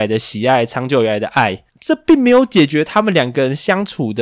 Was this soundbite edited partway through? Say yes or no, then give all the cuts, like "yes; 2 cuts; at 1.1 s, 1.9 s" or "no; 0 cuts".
yes; 1 cut; at 1.7 s